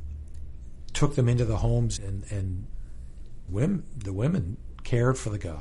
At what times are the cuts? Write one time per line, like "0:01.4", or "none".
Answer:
0:02.0
0:03.5